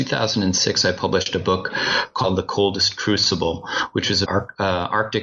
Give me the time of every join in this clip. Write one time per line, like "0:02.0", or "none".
0:04.2